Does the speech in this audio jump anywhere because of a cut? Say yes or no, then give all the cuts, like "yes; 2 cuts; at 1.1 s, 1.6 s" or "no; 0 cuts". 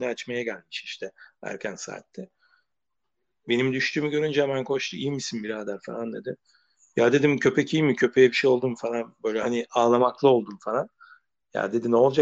no; 0 cuts